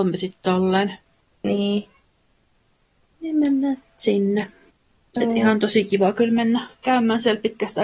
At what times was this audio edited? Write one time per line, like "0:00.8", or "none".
none